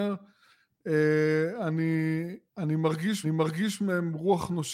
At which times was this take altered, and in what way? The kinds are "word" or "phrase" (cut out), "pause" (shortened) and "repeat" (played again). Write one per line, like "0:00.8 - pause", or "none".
0:02.5 - pause
0:03.2 - repeat

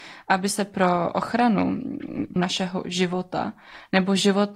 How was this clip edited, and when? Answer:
0:02.4 - phrase

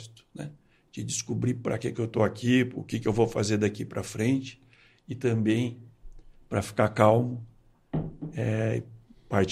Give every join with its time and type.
none

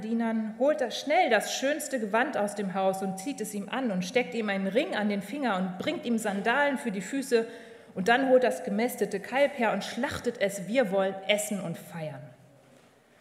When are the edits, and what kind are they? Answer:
none

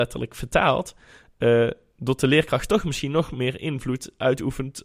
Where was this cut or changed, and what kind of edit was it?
none

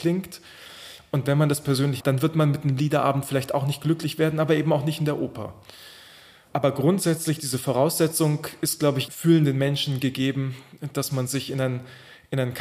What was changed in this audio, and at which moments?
0:02.0 - phrase
0:09.1 - word

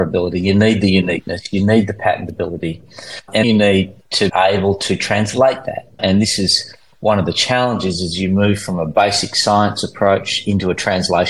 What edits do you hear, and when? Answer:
0:03.4 - word
0:04.3 - word

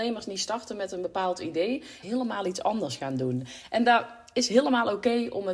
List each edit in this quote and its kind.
0:02.0 - phrase

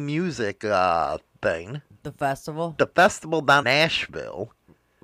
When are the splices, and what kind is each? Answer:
0:03.6 - word

